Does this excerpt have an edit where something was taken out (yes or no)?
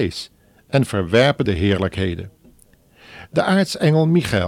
yes